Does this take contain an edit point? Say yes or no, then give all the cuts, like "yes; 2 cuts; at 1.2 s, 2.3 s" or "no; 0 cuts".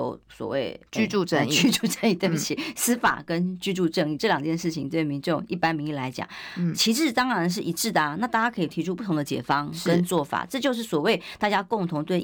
no; 0 cuts